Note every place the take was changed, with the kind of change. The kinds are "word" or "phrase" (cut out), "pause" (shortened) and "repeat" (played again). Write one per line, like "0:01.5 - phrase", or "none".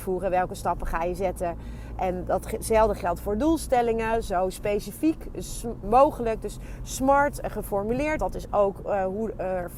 0:05.8 - word
0:08.2 - word